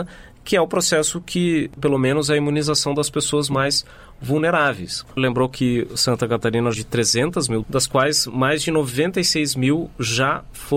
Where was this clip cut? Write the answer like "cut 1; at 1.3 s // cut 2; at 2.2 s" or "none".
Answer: cut 1; at 1.8 s // cut 2; at 5.2 s // cut 3; at 6.7 s // cut 4; at 7.6 s